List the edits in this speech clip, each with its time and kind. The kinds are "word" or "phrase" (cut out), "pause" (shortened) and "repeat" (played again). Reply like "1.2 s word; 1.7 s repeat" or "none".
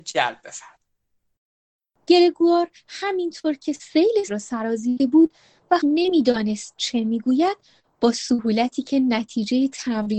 4.3 s word; 5.0 s word; 5.8 s word